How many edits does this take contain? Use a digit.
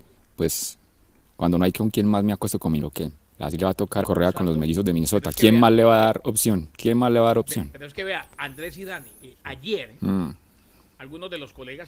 3